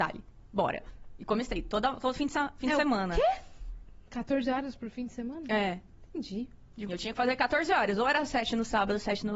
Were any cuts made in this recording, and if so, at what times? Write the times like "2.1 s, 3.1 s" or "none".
6.9 s